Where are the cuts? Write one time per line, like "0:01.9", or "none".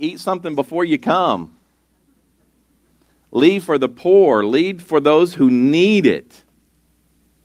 0:03.6
0:04.8